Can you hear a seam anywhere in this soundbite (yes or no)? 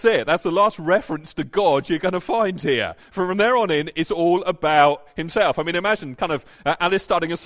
no